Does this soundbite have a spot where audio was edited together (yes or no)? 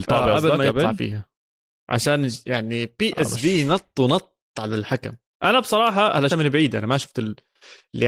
yes